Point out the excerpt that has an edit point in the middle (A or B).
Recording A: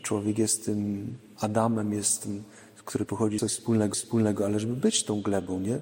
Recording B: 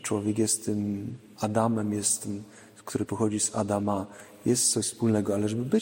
A